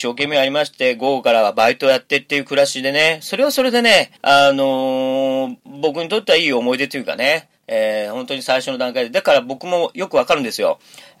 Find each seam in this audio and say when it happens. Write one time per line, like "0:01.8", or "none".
0:04.2